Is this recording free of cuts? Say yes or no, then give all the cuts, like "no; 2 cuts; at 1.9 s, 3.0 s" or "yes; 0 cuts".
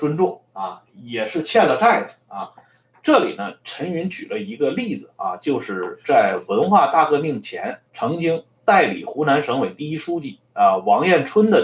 no; 2 cuts; at 2.2 s, 7.9 s